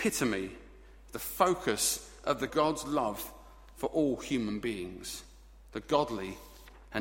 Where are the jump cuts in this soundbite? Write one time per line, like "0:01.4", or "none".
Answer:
0:02.5